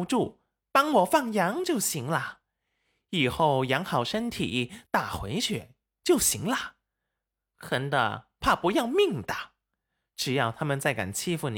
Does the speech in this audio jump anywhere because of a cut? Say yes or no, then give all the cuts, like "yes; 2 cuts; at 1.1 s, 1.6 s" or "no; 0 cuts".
no; 0 cuts